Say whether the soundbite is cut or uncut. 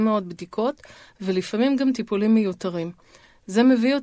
uncut